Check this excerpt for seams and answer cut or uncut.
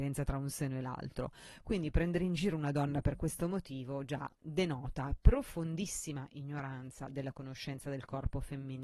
uncut